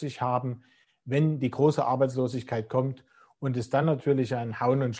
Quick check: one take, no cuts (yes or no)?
yes